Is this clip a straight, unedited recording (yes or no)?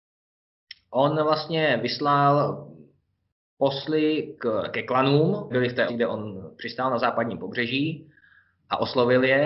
no